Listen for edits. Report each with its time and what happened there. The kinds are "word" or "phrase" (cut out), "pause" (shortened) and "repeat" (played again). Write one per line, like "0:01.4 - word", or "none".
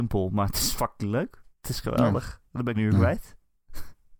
0:01.5 - pause
0:02.7 - word